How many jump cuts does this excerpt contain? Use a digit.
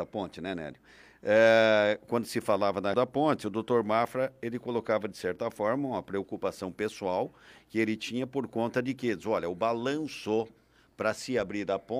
1